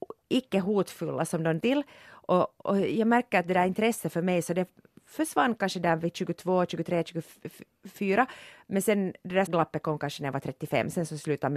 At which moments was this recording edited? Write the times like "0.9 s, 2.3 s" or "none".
1.6 s, 2.6 s, 9.5 s